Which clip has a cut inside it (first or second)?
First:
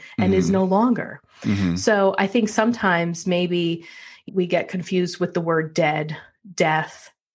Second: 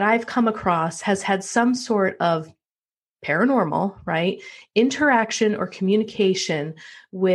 first